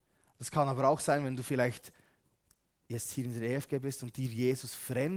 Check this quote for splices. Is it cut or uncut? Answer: uncut